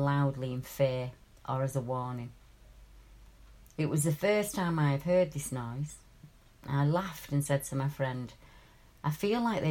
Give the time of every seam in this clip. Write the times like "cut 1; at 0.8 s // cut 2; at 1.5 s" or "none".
none